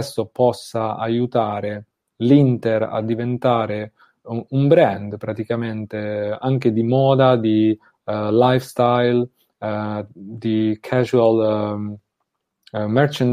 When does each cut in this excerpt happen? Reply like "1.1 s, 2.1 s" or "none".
none